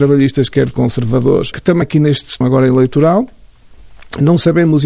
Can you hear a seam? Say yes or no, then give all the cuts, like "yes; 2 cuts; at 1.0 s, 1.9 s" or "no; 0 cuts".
yes; 3 cuts; at 1.5 s, 1.8 s, 2.4 s